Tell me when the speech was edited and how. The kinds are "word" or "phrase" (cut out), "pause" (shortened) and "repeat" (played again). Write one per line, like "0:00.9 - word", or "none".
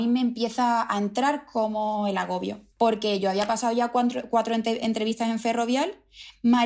0:02.7 - pause